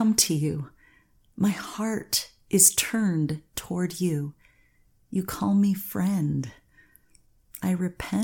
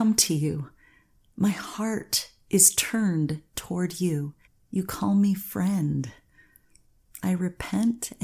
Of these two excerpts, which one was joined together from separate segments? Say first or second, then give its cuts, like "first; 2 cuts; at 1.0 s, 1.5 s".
second; 1 cut; at 4.5 s